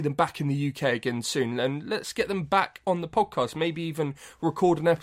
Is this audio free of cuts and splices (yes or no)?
yes